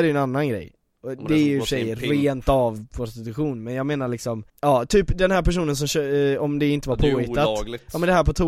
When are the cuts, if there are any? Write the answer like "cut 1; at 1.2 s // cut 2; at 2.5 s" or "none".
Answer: cut 1; at 4.5 s